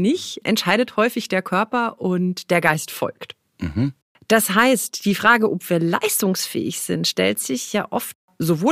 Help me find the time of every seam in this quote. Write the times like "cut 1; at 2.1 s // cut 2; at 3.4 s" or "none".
none